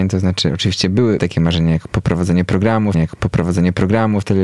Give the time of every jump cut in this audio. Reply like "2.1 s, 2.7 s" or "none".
1.2 s, 2.9 s